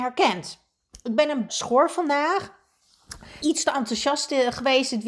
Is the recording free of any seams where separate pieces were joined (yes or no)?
no